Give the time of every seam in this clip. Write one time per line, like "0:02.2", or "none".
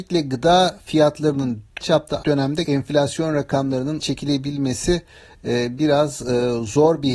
0:01.8
0:02.2
0:02.6
0:04.0